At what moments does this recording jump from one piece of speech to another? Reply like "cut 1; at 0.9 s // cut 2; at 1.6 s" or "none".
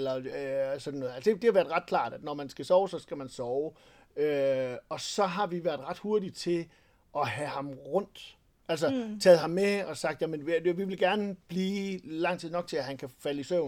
none